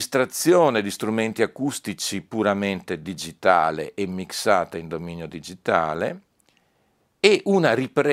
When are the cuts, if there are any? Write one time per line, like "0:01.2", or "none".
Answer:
none